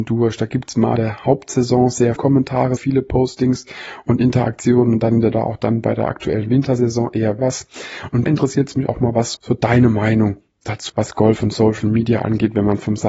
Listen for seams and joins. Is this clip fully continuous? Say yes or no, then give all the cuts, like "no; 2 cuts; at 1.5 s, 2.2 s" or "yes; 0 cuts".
no; 9 cuts; at 1.0 s, 2.2 s, 2.8 s, 5.3 s, 7.4 s, 8.3 s, 8.9 s, 9.3 s, 10.9 s